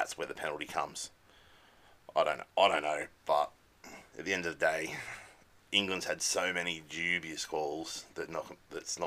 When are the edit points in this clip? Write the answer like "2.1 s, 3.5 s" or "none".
5.5 s